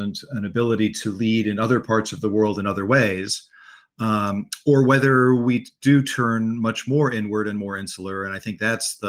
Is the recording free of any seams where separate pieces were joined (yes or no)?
yes